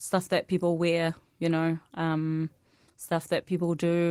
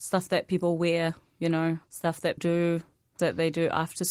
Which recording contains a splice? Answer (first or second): second